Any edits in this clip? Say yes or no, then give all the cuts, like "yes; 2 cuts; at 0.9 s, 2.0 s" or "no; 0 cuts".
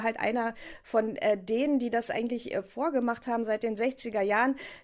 no; 0 cuts